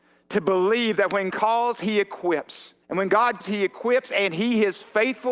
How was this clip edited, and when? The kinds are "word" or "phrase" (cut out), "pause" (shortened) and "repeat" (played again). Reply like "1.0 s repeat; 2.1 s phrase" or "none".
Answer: 1.3 s word; 2.8 s pause; 3.4 s word